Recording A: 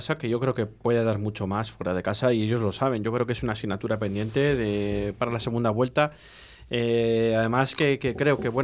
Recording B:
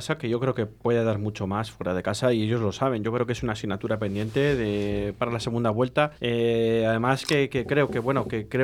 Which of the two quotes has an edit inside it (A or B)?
B